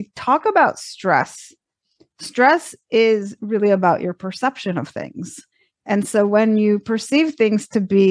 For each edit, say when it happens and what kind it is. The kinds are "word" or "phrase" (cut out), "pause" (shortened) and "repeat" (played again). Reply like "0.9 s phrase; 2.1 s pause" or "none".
none